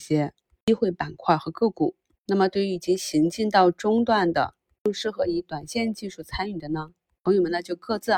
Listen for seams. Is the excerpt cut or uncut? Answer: uncut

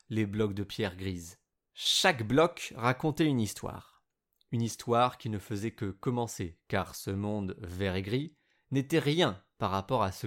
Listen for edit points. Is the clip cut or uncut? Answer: uncut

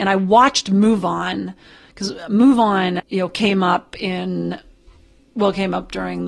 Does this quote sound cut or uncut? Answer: cut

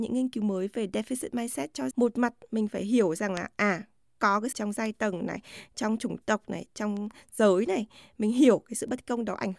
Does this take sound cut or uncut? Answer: cut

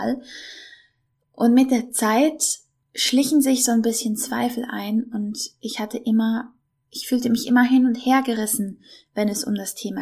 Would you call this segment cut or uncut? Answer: uncut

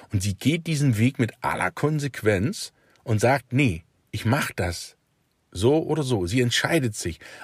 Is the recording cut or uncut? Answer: uncut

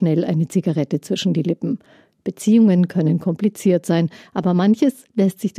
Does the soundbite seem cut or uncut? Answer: uncut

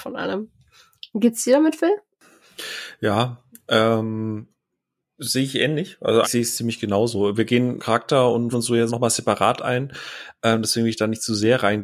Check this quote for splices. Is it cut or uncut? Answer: cut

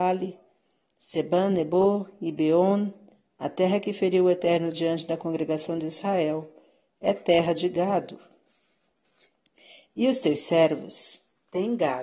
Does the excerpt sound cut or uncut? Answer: uncut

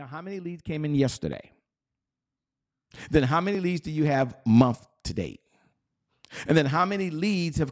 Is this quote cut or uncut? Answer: uncut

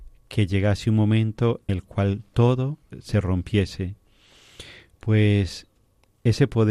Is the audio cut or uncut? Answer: cut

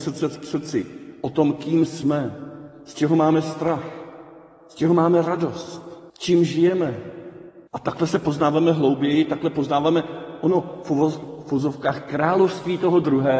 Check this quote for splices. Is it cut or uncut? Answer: cut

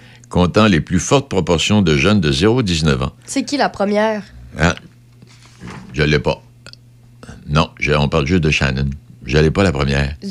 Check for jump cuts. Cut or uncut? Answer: cut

